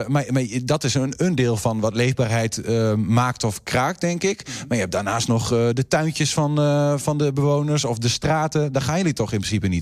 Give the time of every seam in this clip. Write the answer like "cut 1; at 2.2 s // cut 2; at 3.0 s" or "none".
none